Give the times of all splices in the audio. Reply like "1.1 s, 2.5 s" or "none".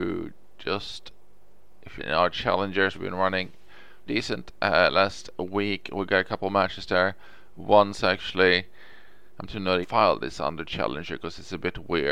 2.0 s, 2.9 s, 4.1 s, 9.5 s, 9.8 s